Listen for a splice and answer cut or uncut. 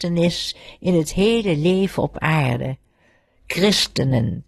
uncut